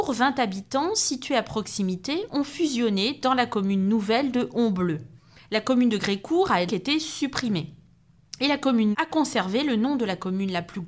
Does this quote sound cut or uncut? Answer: cut